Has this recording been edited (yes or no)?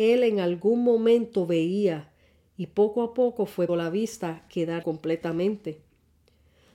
yes